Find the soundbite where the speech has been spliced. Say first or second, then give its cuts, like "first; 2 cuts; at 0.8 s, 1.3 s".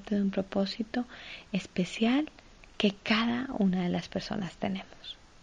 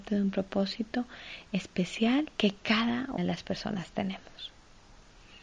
second; 2 cuts; at 2.3 s, 3.2 s